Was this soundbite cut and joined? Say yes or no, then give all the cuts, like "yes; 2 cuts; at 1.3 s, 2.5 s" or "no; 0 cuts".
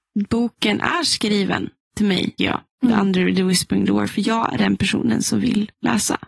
yes; 1 cut; at 2.4 s